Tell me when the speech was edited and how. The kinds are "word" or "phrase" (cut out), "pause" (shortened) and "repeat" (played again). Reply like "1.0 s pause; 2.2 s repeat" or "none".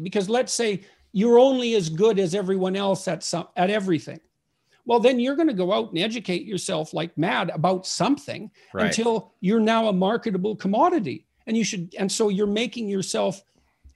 none